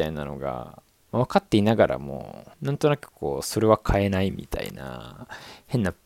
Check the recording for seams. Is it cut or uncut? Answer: cut